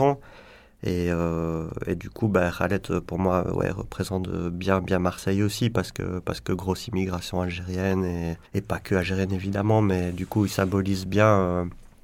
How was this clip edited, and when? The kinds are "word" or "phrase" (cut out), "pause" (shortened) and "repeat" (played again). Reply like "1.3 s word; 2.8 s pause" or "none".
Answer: 8.5 s pause